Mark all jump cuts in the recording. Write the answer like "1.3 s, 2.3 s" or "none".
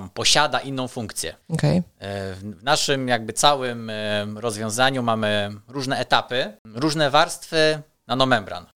1.4 s